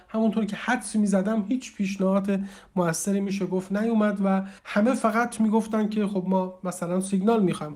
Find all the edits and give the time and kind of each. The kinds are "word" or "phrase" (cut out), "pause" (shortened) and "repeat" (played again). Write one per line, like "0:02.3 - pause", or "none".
0:04.6 - pause